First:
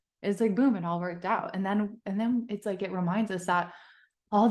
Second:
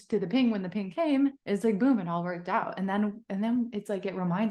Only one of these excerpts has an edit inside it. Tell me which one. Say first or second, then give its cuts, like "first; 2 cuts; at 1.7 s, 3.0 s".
second; 1 cut; at 1.4 s